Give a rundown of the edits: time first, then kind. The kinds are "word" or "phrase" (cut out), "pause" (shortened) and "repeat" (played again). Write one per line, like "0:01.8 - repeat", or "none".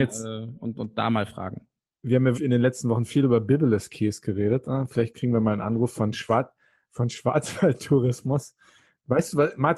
0:02.3 - word